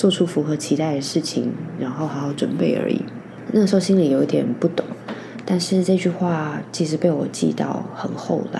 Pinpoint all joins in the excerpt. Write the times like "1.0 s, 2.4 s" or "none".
none